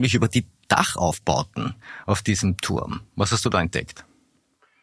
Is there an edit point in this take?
no; 0 cuts

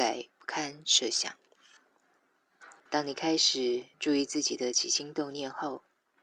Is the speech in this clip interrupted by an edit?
yes; 2 cuts; at 2.8 s, 3.9 s

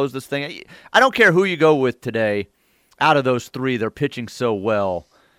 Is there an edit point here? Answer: no; 0 cuts

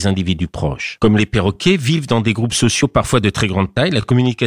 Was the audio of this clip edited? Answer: no; 0 cuts

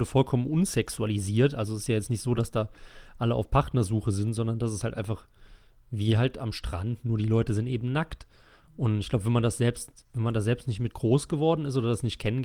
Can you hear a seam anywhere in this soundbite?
no; 0 cuts

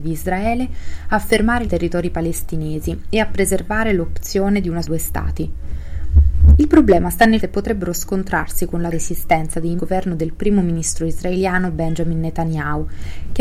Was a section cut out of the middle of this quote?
yes; 5 cuts; at 1.6 s, 4.8 s, 7.4 s, 8.9 s, 9.8 s

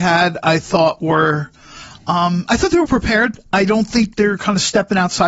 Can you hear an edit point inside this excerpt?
yes; 2 cuts; at 2.9 s, 4.1 s

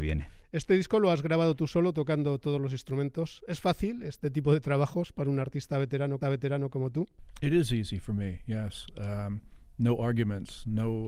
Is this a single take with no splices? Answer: no; 1 cut; at 6.2 s

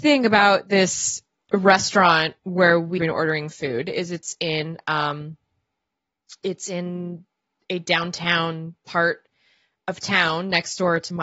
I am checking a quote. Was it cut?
yes; 2 cuts; at 2.4 s, 3.0 s

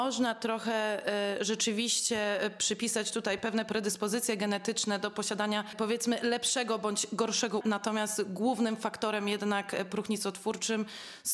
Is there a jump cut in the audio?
yes; 1 cut; at 7.6 s

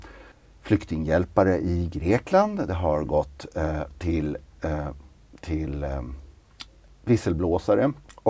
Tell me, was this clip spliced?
no; 0 cuts

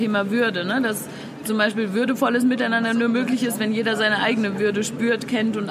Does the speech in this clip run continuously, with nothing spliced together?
yes; 0 cuts

